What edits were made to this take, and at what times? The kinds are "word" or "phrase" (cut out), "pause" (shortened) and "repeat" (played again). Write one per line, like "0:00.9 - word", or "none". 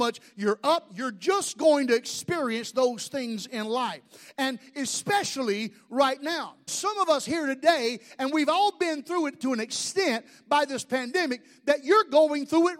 0:06.7 - word